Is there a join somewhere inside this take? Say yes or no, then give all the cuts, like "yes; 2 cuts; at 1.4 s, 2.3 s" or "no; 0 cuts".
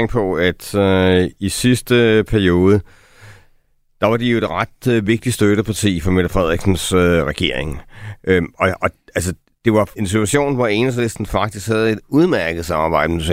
yes; 1 cut; at 10.0 s